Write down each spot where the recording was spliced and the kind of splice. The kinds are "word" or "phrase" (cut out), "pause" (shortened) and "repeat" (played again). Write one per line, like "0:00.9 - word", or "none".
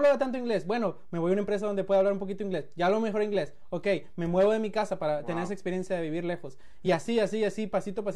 none